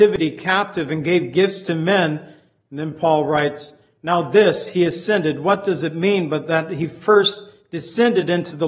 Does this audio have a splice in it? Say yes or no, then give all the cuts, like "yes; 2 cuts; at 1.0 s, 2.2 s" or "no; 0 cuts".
no; 0 cuts